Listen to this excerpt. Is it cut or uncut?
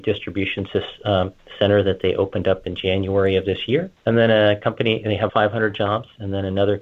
cut